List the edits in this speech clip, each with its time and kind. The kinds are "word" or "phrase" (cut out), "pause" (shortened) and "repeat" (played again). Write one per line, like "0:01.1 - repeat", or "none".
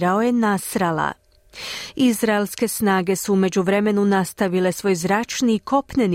none